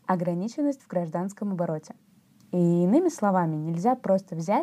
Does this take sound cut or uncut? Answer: uncut